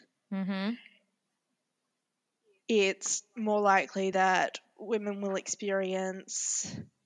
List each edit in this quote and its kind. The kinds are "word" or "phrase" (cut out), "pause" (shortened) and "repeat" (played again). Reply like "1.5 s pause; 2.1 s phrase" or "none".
none